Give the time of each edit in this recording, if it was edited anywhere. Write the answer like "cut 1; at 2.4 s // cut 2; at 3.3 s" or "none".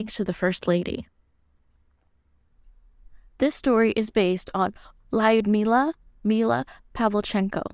none